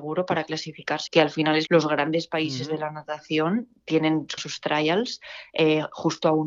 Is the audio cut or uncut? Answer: cut